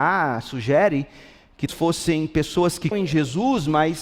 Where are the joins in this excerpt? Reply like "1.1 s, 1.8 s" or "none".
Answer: 1.7 s, 2.9 s